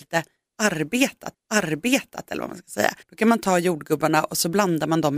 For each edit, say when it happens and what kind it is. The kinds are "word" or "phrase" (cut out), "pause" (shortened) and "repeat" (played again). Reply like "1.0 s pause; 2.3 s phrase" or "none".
1.3 s repeat; 3.0 s pause